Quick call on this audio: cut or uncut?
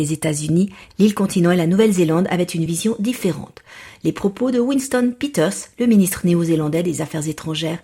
uncut